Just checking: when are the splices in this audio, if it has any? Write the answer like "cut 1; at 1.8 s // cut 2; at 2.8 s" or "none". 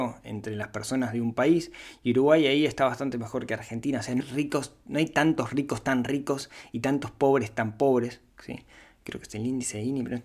cut 1; at 4.2 s